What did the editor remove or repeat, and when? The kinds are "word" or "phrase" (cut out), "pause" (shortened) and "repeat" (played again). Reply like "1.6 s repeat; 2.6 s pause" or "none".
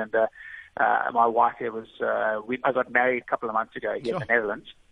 3.2 s word